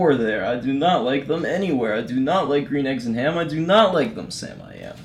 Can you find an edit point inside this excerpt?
no; 0 cuts

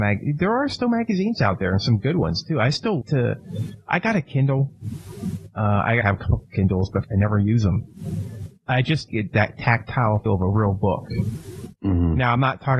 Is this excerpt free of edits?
no; 5 cuts; at 3.0 s, 6.0 s, 7.0 s, 9.1 s, 10.3 s

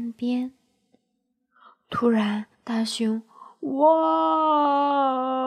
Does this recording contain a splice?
yes; 2 cuts; at 2.5 s, 3.3 s

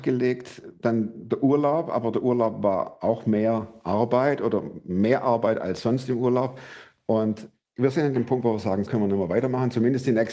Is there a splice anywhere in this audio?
yes; 2 cuts; at 7.6 s, 8.9 s

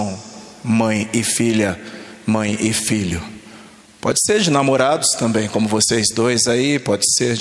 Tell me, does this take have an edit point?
no; 0 cuts

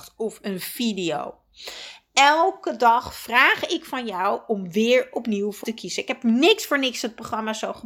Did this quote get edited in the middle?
yes; 1 cut; at 5.6 s

